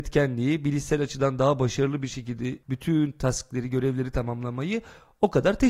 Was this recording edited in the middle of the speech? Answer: no; 0 cuts

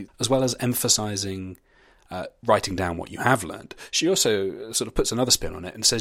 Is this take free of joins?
yes; 0 cuts

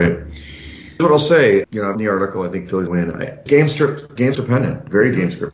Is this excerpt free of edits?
no; 6 cuts; at 1.0 s, 1.6 s, 1.9 s, 2.9 s, 3.5 s, 4.3 s

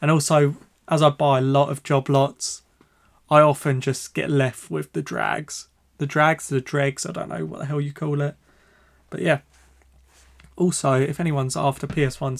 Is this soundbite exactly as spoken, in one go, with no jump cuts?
yes; 0 cuts

